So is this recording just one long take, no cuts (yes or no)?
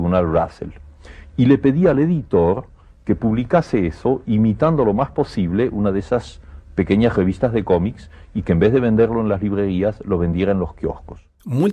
yes